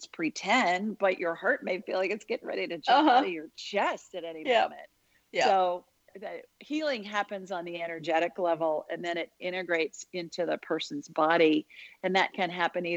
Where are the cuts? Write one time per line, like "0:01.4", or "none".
0:06.1